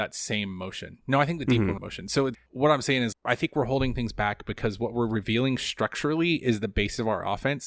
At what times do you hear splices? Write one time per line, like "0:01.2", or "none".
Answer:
0:01.8
0:02.3
0:03.1

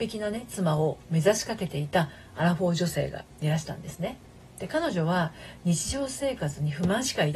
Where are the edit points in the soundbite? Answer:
0:04.5

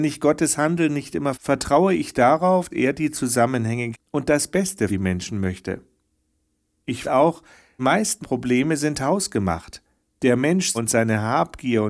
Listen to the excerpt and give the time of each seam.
0:01.3
0:02.7
0:03.9
0:04.9
0:07.0
0:07.8
0:08.2
0:10.7

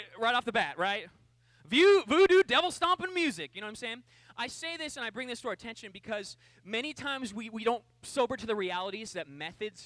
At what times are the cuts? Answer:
none

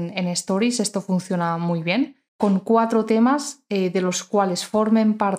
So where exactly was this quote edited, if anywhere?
0:02.3

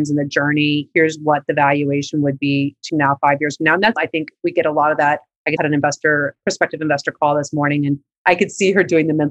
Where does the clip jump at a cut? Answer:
0:02.9
0:04.0
0:05.6

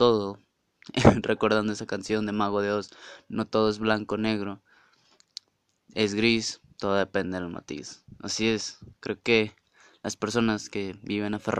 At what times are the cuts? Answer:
none

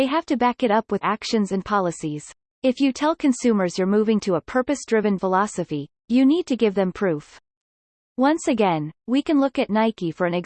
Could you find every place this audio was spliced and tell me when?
0:01.0
0:02.4
0:05.2

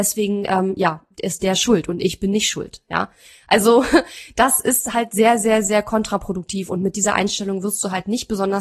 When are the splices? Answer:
none

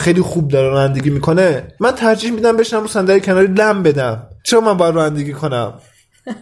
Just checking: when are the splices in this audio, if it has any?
0:01.8
0:04.4

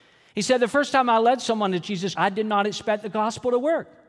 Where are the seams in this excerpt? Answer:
0:02.2

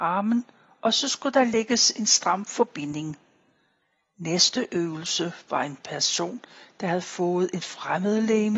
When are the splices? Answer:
none

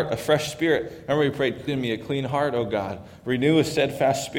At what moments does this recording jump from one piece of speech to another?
0:01.7

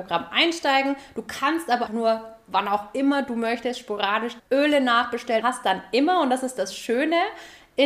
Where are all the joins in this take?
0:01.9
0:04.4
0:05.4

